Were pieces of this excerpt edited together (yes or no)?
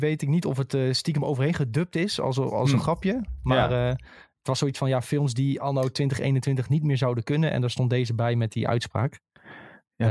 no